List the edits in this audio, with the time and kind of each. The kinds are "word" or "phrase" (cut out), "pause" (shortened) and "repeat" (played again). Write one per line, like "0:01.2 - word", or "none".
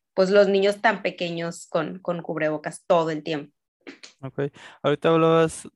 none